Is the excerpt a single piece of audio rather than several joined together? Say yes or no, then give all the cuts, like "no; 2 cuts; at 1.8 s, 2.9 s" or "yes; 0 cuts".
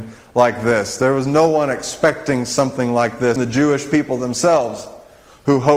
no; 1 cut; at 3.4 s